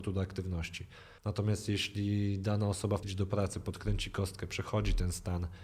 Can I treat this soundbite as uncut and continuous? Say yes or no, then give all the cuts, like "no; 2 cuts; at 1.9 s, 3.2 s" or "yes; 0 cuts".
no; 2 cuts; at 1.2 s, 3.0 s